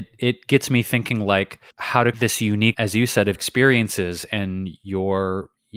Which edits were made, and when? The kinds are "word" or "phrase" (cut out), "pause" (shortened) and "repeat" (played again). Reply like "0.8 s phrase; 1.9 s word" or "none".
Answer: 1.7 s pause; 2.1 s word; 2.7 s word; 3.4 s word

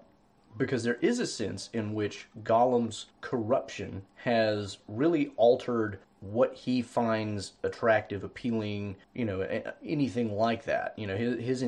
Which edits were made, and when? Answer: 3.1 s pause; 6.0 s pause; 9.0 s pause

